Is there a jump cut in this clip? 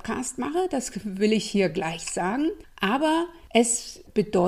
no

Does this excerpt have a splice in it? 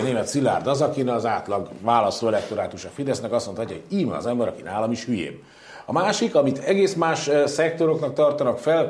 no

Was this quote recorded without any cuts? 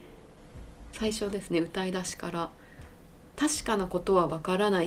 yes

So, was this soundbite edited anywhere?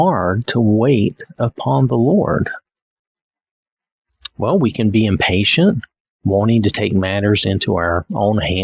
no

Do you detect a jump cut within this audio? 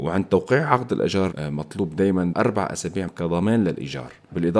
yes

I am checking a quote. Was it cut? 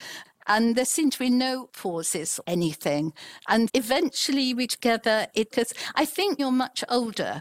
yes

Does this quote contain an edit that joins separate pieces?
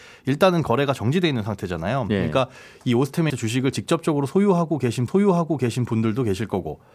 yes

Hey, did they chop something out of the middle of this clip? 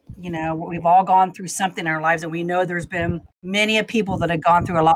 yes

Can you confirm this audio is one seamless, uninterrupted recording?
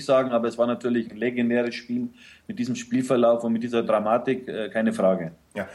yes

